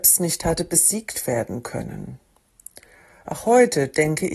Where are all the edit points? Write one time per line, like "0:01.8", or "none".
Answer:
none